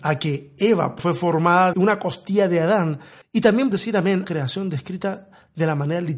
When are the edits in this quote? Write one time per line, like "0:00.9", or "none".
0:01.0
0:01.7
0:03.2
0:03.7
0:04.2